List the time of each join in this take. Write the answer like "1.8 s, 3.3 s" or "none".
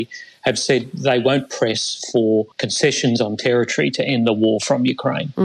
2.5 s

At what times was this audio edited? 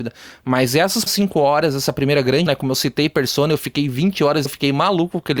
1.1 s, 2.5 s, 4.5 s

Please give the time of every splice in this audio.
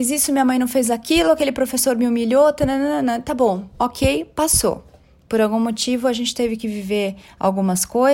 none

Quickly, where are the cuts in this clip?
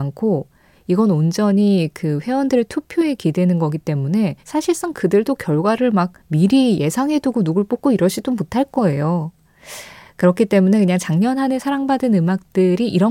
4.4 s, 6.2 s

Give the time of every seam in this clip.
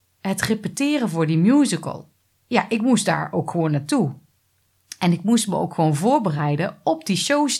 none

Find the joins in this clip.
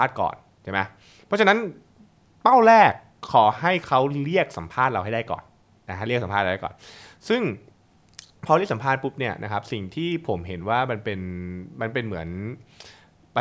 none

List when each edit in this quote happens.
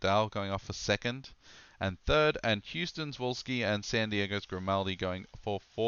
none

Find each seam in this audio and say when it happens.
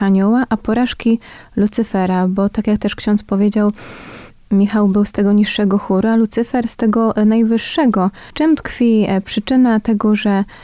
none

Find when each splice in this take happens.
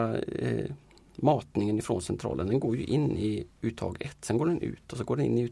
none

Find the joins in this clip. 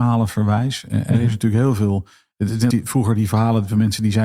2.7 s

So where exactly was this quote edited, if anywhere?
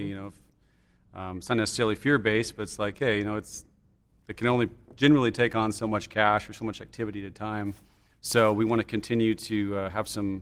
8.1 s

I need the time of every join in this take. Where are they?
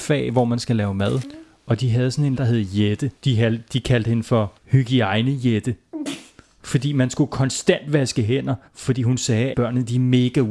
2.4 s, 3.2 s, 4.6 s, 8.7 s, 9.5 s

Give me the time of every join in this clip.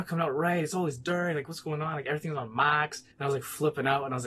3.1 s

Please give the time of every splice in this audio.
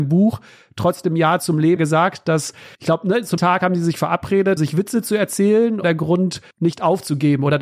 1.8 s, 2.7 s, 3.4 s, 4.6 s, 5.8 s, 6.5 s

